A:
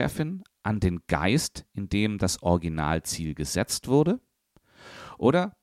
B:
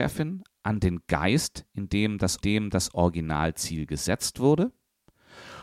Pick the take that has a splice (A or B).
B